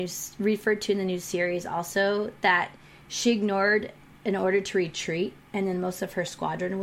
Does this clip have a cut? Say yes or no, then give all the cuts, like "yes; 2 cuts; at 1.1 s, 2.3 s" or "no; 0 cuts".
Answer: no; 0 cuts